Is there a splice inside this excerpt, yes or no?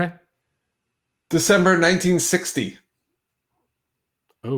no